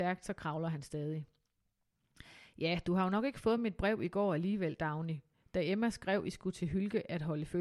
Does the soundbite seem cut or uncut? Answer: uncut